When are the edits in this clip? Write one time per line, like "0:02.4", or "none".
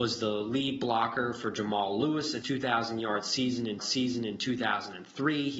0:02.4
0:03.8